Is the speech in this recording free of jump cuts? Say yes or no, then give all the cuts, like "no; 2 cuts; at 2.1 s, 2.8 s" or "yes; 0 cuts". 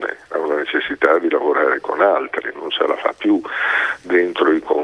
yes; 0 cuts